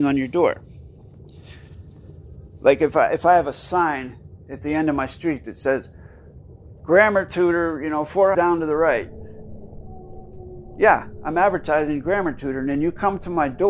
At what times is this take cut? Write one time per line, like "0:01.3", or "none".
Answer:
0:08.3